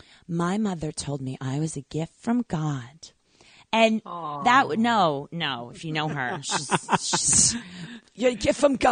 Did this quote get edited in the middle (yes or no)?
no